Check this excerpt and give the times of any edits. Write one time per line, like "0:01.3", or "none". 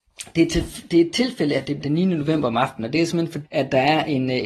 0:01.8
0:03.4